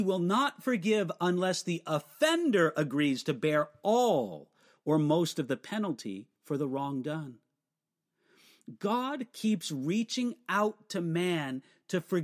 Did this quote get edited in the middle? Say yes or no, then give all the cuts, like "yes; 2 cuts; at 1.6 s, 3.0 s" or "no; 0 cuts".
no; 0 cuts